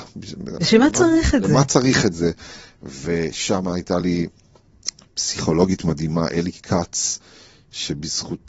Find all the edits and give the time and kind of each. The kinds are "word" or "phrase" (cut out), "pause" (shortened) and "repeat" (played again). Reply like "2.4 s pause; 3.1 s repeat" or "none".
none